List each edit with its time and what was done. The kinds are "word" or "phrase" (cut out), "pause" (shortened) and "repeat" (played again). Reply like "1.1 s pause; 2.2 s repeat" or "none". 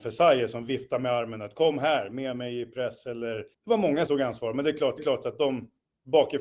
3.5 s pause; 4.1 s word; 5.0 s repeat